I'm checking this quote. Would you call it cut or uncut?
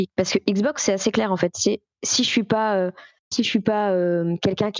uncut